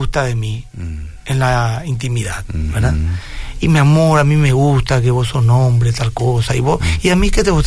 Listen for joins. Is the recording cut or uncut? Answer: uncut